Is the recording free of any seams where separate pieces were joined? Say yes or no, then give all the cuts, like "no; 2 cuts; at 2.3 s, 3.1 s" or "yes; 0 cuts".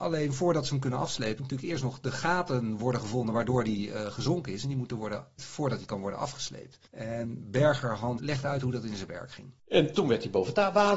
no; 5 cuts; at 1.4 s, 5.4 s, 6.9 s, 8.2 s, 9.6 s